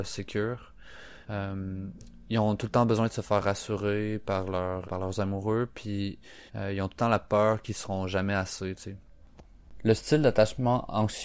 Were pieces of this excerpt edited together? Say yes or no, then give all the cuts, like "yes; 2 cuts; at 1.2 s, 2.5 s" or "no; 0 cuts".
yes; 3 cuts; at 1.2 s, 4.8 s, 6.5 s